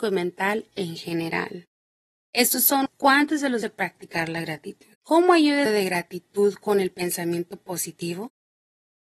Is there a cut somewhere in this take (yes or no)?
yes